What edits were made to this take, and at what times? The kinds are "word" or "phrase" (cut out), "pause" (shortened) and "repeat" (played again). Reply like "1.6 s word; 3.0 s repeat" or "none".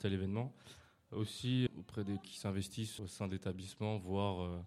1.7 s word; 2.2 s word; 3.0 s word